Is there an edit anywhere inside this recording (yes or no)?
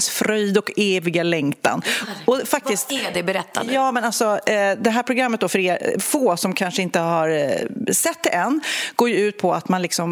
no